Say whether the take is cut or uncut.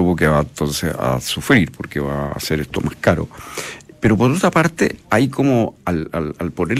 uncut